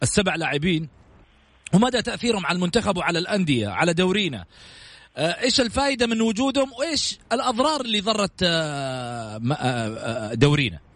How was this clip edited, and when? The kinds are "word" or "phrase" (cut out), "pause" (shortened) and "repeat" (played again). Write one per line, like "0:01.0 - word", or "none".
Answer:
none